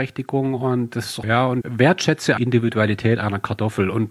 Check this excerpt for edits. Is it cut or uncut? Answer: cut